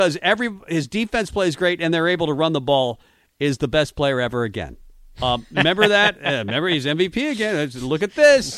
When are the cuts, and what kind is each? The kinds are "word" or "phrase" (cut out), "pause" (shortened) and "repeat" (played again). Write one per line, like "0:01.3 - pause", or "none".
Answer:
none